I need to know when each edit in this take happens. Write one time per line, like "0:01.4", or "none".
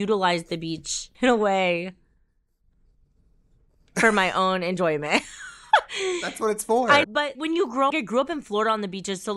0:01.1
0:07.0
0:07.3
0:07.9